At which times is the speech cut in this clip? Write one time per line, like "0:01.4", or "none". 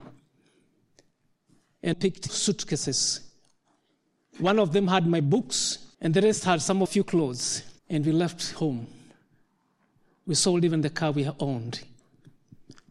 0:01.9
0:02.3
0:05.9
0:06.9
0:07.8